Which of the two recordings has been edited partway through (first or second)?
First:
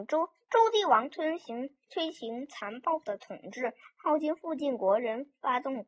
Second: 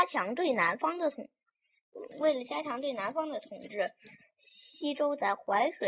first